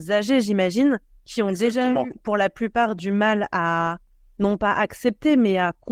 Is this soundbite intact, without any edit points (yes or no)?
yes